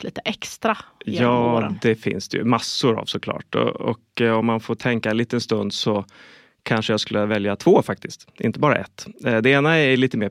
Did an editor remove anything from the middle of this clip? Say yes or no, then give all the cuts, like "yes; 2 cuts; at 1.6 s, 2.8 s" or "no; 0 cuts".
no; 0 cuts